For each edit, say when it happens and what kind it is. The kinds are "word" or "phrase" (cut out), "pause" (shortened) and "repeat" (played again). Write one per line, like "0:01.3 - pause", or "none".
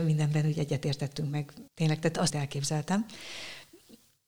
0:01.7 - pause
0:02.3 - phrase